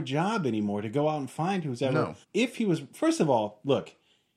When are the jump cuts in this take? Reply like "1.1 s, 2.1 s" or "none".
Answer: 2.2 s